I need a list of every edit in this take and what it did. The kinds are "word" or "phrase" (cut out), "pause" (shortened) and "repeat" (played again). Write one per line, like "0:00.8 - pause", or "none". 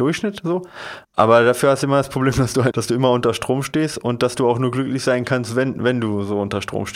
0:01.0 - pause
0:02.7 - phrase